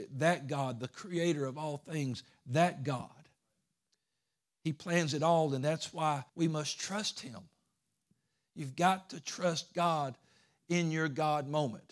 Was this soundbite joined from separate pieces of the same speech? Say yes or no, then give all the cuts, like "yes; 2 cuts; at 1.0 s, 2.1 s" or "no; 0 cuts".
yes; 1 cut; at 6.3 s